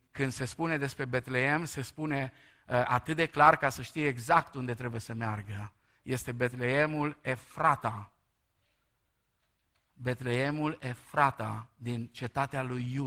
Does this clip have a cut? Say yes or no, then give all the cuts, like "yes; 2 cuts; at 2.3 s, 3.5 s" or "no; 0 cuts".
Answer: no; 0 cuts